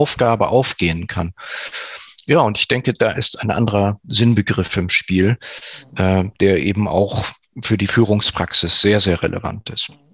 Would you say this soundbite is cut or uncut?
uncut